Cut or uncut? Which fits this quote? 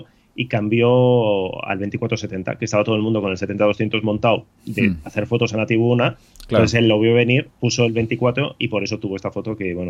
uncut